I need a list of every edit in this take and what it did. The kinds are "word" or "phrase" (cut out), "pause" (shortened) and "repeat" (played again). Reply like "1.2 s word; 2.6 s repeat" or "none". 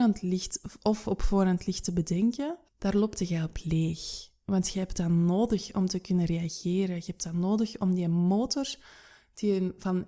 2.7 s pause